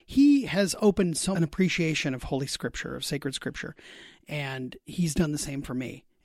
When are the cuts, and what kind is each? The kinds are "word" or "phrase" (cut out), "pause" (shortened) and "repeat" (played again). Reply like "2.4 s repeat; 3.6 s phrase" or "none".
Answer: 1.4 s phrase

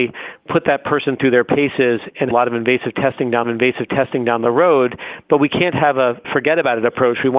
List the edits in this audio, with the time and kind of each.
2.3 s phrase; 3.4 s repeat

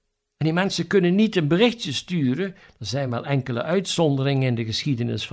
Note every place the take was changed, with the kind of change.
none

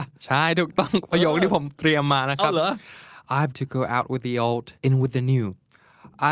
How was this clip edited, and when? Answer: 3.5 s word; 4.8 s pause

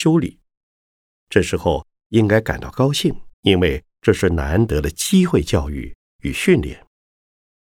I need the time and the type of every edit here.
3.3 s pause

